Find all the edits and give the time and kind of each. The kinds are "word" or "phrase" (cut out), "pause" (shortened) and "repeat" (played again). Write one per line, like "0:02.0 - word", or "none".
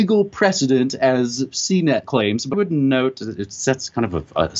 0:02.5 - word